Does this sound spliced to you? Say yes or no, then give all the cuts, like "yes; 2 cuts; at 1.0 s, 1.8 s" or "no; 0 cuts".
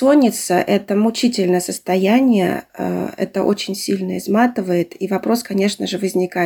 yes; 1 cut; at 2.7 s